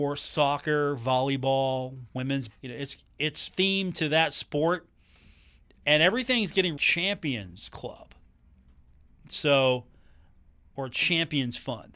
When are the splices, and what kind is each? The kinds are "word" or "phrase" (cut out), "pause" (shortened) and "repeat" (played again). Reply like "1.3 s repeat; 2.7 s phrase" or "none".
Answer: 2.5 s word; 3.5 s word; 6.8 s word